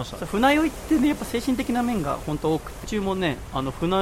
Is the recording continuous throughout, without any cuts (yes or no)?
no